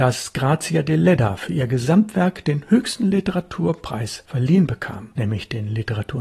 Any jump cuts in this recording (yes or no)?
no